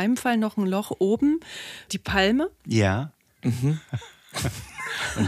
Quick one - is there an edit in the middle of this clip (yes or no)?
yes